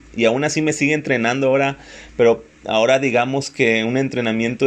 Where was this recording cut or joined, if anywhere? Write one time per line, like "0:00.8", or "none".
0:02.5